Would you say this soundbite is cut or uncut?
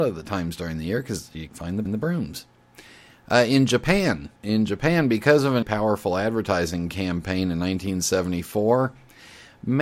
cut